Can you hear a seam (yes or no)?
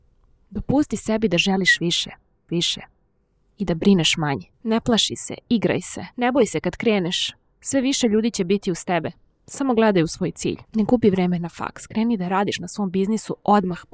yes